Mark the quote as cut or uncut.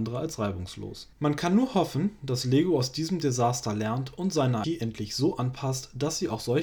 cut